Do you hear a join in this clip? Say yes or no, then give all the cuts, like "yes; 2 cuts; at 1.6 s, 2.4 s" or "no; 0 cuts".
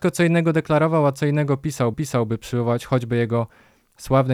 yes; 1 cut; at 1.9 s